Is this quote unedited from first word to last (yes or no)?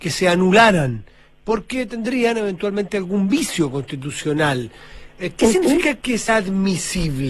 no